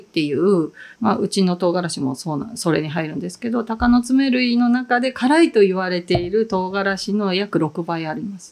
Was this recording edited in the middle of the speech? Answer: yes; 1 cut; at 0.9 s

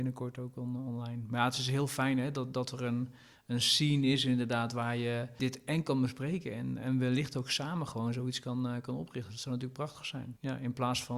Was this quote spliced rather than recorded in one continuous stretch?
no; 0 cuts

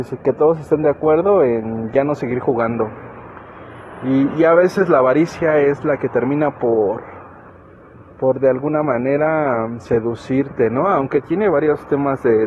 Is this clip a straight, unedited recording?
no; 1 cut; at 7.5 s

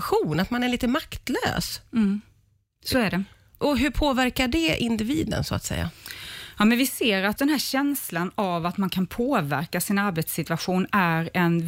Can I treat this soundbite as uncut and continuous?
no; 2 cuts; at 3.6 s, 7.4 s

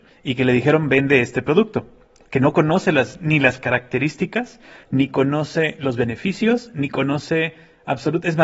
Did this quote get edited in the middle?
no; 0 cuts

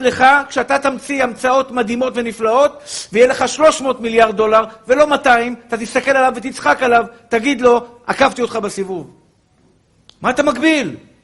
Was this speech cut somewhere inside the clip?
yes; 1 cut; at 9.9 s

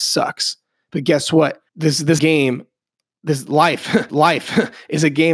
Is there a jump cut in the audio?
yes; 3 cuts; at 1.7 s, 2.2 s, 4.1 s

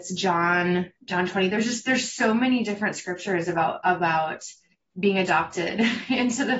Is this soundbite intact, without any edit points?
yes; 0 cuts

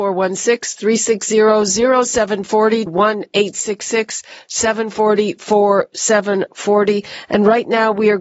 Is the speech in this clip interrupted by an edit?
yes; 1 cut; at 2.9 s

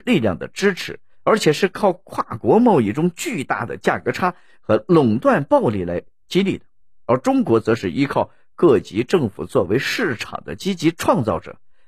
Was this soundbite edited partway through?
no; 0 cuts

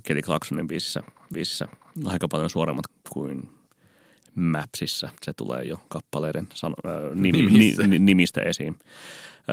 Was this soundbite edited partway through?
yes; 3 cuts; at 1.3 s, 2.9 s, 5.2 s

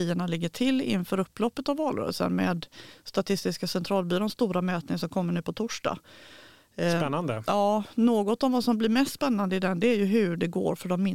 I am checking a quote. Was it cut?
no; 0 cuts

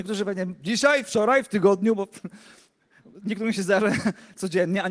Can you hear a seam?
no; 0 cuts

